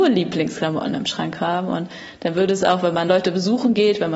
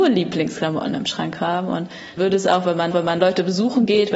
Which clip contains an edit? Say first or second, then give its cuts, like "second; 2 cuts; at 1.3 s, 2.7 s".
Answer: second; 2 cuts; at 2.2 s, 2.9 s